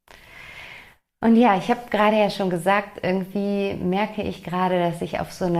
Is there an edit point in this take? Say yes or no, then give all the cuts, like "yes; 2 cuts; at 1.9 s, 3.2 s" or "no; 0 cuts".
no; 0 cuts